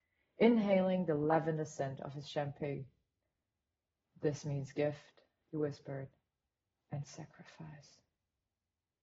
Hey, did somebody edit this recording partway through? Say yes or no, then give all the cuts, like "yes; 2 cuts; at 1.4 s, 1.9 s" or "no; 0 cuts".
no; 0 cuts